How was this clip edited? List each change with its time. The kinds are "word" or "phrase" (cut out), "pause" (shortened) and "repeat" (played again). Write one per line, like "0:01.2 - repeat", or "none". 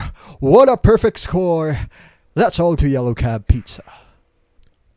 0:02.8 - word